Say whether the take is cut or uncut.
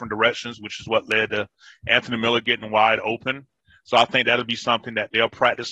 uncut